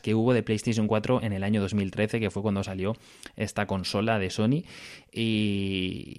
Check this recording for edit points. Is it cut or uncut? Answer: uncut